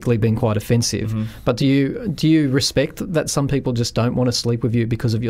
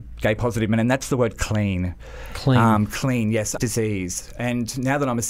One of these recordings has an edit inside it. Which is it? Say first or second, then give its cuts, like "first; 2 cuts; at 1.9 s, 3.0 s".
second; 1 cut; at 3.6 s